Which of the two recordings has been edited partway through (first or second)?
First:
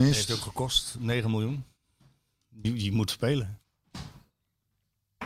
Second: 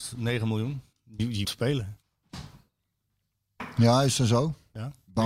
second